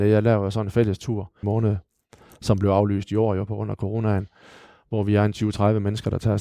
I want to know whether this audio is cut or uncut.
cut